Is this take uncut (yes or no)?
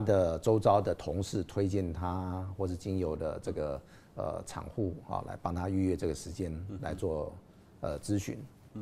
yes